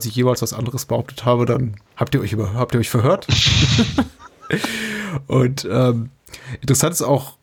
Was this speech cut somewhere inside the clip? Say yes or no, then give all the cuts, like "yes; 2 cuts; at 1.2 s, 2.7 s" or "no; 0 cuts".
yes; 1 cut; at 1.9 s